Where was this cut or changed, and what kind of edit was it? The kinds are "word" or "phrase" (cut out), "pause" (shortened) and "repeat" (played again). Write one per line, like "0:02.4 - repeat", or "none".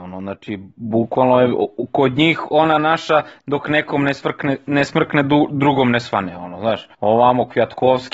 0:06.9 - pause